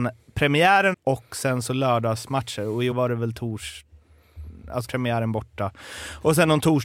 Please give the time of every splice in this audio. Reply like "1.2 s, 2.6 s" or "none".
0.9 s, 2.9 s, 4.8 s